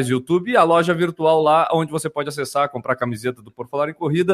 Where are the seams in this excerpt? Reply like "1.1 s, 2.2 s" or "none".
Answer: none

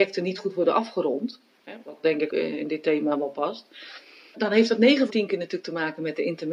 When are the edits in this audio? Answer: 1.8 s, 2.3 s, 4.3 s, 5.1 s

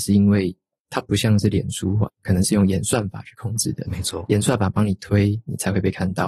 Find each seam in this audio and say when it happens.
2.1 s

